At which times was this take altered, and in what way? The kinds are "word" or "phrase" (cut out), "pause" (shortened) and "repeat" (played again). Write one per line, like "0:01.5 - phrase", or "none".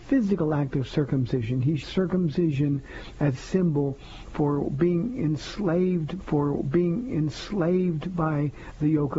0:01.8 - word
0:03.3 - word
0:06.2 - repeat